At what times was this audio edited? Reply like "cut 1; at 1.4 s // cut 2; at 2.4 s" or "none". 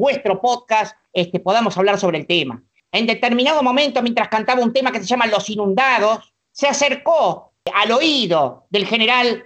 cut 1; at 1.1 s